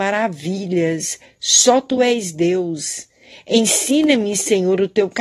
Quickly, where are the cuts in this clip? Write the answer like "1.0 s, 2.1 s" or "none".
none